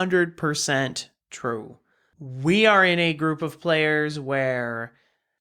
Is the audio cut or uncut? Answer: uncut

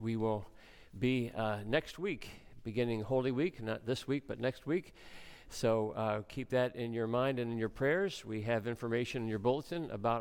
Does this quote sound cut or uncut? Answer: uncut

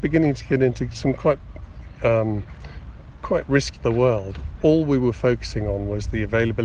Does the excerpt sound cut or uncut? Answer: cut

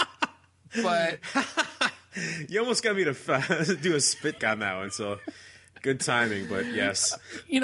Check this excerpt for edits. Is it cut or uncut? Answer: cut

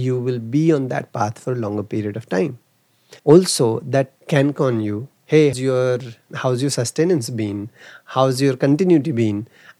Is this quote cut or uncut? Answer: cut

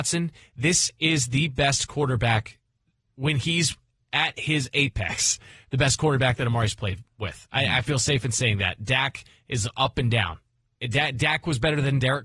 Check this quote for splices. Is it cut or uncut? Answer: uncut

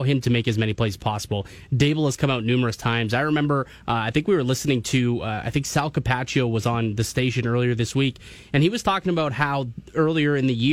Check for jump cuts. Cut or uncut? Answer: uncut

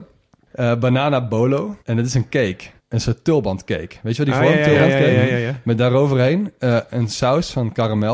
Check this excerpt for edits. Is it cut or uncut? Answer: cut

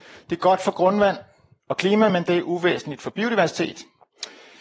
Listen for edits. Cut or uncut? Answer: uncut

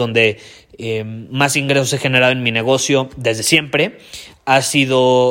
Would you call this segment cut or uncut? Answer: uncut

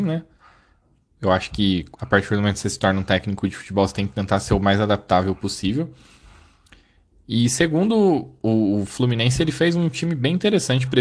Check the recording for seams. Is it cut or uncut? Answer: cut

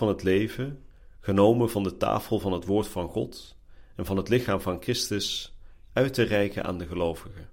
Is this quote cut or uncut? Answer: uncut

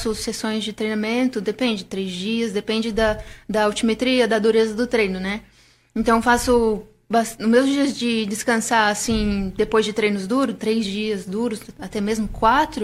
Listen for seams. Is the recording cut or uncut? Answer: uncut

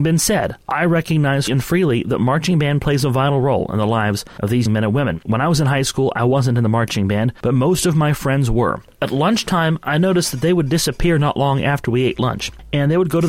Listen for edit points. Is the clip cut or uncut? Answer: cut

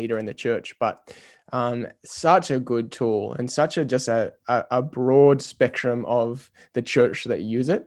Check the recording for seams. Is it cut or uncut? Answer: uncut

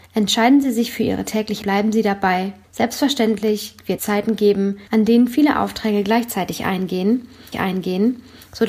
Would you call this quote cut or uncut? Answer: cut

